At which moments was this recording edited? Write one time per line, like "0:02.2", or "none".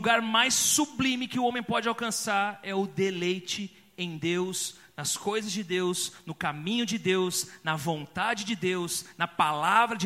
none